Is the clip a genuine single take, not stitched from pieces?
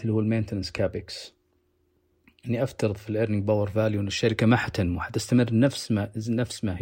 yes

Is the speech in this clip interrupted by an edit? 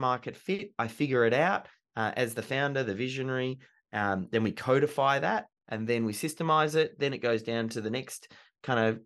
no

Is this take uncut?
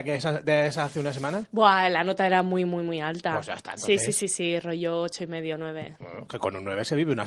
yes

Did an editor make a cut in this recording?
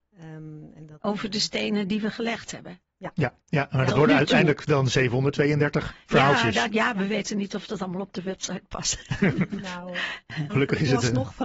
yes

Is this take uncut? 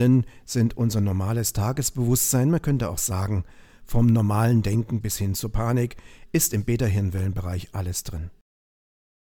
yes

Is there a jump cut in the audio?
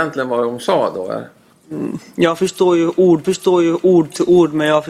yes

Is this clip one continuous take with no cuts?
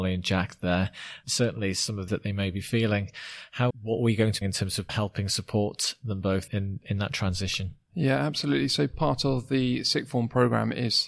no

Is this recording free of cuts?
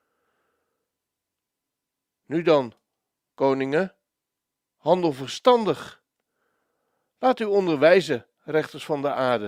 yes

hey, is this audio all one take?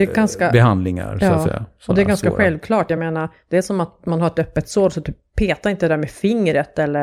yes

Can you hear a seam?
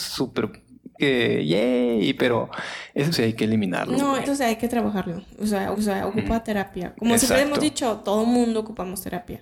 yes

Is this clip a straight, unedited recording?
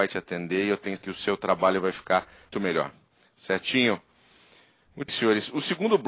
no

